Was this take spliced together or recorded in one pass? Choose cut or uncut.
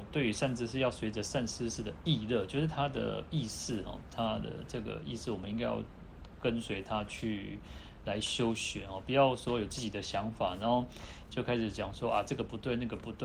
uncut